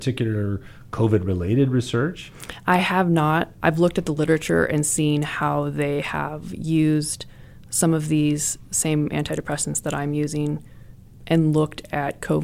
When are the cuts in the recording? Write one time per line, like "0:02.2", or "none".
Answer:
none